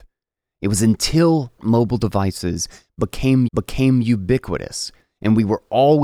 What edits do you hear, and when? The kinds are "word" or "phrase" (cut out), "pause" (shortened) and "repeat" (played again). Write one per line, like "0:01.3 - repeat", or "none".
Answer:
0:01.6 - phrase
0:03.5 - repeat